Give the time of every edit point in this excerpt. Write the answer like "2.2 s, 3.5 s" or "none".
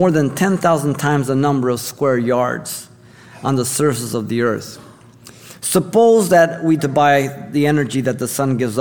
6.8 s